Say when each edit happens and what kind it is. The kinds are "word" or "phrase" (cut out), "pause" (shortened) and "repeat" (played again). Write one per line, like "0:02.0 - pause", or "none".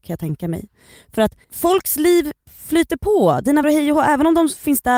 0:01.4 - pause
0:02.4 - pause
0:03.6 - word